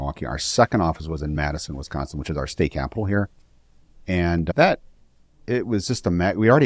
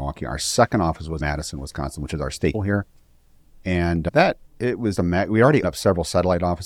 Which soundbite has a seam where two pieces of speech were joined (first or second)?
second